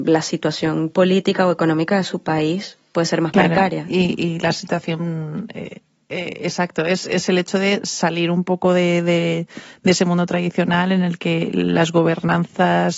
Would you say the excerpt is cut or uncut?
uncut